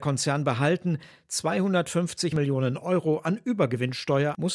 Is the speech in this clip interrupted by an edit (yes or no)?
no